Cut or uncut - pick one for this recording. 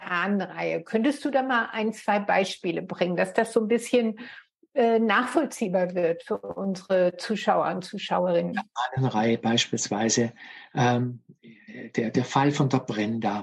uncut